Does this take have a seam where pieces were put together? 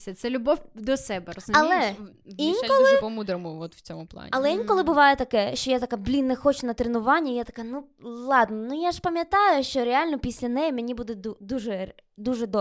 no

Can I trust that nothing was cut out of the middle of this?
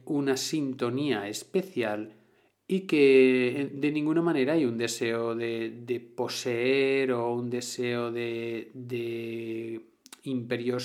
yes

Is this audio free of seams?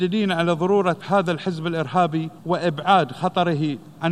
no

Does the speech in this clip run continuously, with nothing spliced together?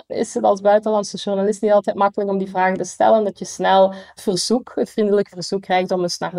yes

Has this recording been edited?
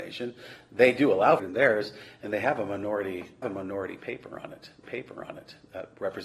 yes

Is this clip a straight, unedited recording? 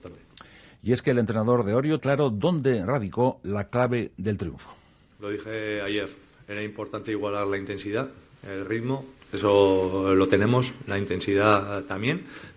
no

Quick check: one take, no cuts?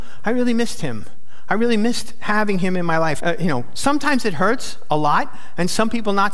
no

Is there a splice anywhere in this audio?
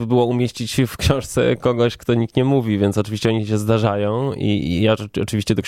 no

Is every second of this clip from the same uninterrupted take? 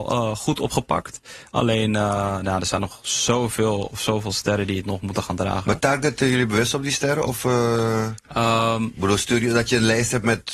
yes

